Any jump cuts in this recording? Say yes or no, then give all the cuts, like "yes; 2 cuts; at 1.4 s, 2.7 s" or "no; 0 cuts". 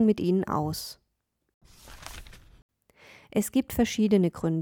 no; 0 cuts